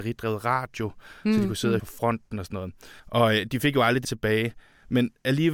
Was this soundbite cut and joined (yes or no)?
yes